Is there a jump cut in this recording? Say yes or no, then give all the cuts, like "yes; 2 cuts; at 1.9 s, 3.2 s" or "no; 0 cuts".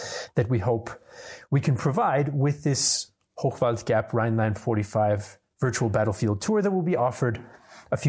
no; 0 cuts